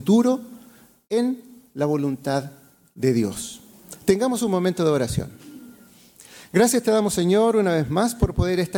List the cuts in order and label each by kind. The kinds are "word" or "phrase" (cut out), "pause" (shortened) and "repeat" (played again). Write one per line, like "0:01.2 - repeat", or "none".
none